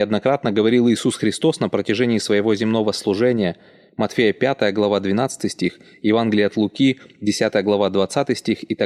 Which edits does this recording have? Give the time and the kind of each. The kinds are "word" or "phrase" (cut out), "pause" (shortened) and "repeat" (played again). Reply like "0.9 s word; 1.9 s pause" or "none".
none